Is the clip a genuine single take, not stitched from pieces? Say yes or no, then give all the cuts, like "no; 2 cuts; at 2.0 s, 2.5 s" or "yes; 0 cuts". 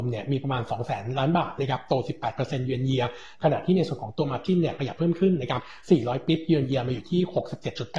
yes; 0 cuts